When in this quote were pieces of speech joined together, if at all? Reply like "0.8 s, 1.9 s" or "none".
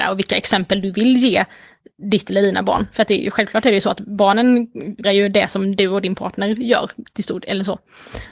5.0 s